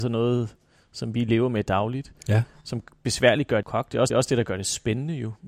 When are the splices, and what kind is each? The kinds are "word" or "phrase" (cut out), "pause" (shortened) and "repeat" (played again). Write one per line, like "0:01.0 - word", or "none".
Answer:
0:03.6 - phrase
0:04.1 - repeat